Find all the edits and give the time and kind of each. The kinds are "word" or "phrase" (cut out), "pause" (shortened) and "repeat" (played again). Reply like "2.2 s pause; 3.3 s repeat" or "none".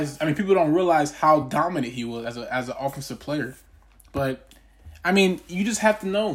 none